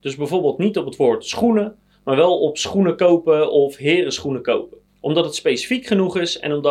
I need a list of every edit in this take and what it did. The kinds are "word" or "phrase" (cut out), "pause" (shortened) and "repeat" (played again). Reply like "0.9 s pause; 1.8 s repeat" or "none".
4.9 s pause